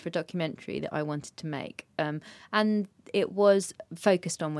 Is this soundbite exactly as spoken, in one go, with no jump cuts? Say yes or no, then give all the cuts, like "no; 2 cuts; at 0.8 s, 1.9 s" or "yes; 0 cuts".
yes; 0 cuts